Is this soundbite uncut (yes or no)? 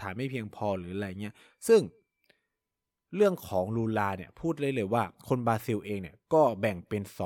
yes